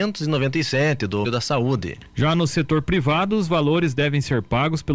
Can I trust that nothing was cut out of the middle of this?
no; 1 cut; at 1.2 s

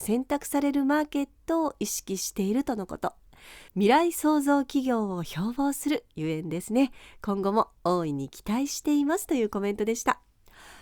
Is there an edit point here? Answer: yes; 1 cut; at 3.7 s

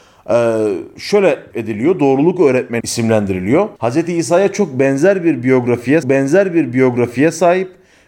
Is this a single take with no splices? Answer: no; 4 cuts; at 1.5 s, 2.8 s, 3.8 s, 6.0 s

